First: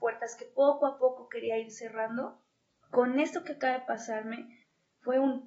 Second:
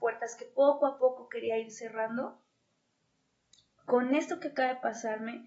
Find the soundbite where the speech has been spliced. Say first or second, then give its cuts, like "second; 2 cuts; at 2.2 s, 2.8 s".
first; 1 cut; at 2.7 s